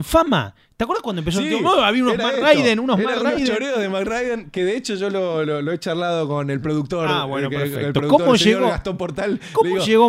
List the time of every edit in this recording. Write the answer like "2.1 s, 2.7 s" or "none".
none